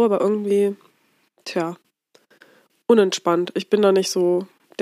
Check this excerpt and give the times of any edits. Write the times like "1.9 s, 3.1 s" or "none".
none